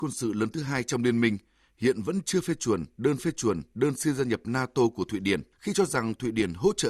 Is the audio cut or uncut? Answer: cut